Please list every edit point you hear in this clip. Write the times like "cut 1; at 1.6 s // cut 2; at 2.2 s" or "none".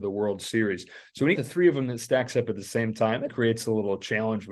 cut 1; at 1.4 s // cut 2; at 3.3 s